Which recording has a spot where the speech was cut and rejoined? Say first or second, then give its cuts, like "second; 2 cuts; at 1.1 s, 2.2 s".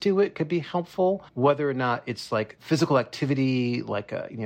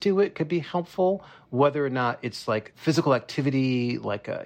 first; 1 cut; at 1.3 s